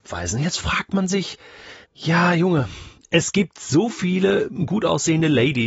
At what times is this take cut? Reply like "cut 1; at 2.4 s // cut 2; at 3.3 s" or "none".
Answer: cut 1; at 1.8 s